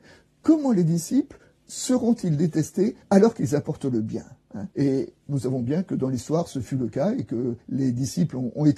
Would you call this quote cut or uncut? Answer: cut